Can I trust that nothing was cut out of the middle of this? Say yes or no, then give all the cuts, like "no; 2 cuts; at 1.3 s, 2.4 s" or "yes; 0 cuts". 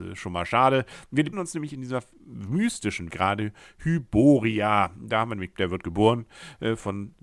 no; 3 cuts; at 1.3 s, 3.1 s, 5.5 s